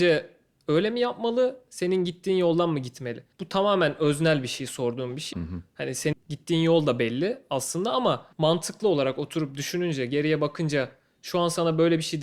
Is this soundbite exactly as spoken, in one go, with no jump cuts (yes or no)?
no